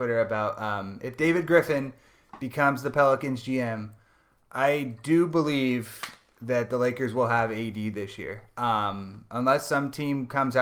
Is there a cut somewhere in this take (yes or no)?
no